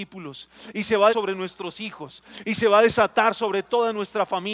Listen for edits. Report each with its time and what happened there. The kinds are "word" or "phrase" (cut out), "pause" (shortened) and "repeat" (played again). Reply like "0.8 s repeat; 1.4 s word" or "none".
1.1 s word